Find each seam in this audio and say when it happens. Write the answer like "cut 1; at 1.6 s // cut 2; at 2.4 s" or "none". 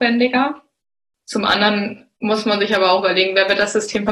cut 1; at 2.2 s

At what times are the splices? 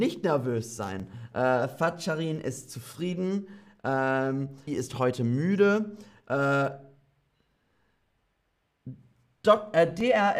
cut 1; at 4.7 s

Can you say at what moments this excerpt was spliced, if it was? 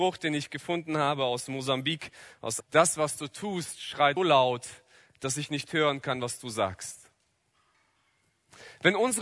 cut 1; at 2.6 s // cut 2; at 4.2 s

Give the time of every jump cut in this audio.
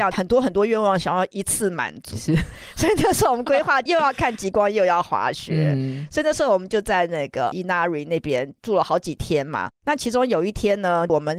cut 1; at 9.8 s

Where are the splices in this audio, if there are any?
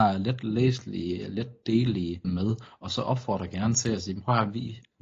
cut 1; at 2.2 s

